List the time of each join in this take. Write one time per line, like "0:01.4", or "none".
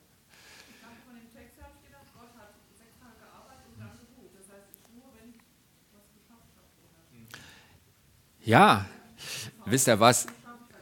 none